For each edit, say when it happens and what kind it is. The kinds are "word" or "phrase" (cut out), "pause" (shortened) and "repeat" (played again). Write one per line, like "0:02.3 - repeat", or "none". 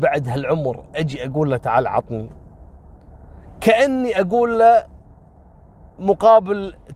0:06.0 - word

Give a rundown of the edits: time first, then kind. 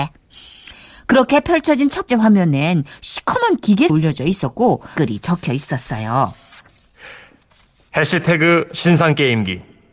0:02.1 - word
0:03.9 - word
0:05.0 - phrase

